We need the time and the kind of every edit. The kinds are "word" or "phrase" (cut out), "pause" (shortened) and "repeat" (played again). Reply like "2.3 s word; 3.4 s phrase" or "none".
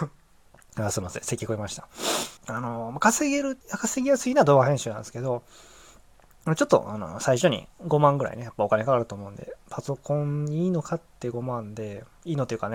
2.4 s pause; 3.6 s pause